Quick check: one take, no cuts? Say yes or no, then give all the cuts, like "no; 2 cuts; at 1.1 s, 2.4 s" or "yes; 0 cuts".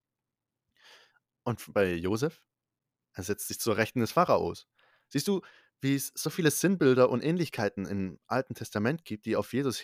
yes; 0 cuts